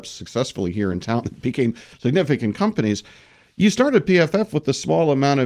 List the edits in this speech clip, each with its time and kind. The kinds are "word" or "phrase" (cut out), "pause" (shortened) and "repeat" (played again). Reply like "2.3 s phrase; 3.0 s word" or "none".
none

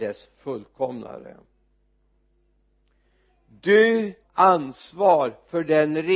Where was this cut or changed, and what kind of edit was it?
4.2 s word

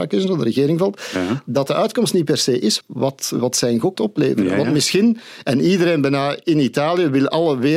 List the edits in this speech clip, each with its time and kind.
2.8 s word; 3.9 s word

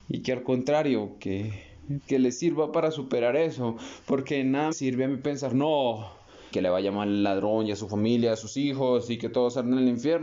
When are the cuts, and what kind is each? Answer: 2.1 s word; 4.7 s word; 6.5 s word

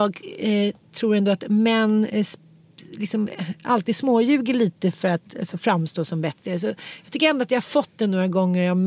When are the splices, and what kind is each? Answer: none

